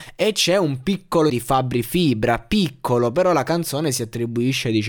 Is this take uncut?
no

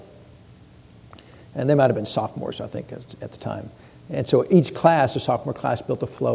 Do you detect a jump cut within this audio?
no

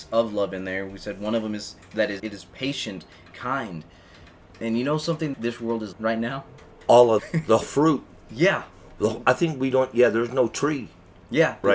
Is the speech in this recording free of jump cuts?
no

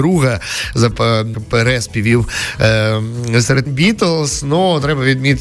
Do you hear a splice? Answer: yes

